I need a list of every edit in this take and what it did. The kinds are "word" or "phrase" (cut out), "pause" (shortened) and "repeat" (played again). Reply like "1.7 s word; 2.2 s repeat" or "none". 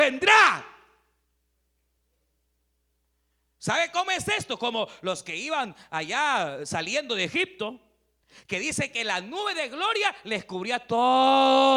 8.2 s pause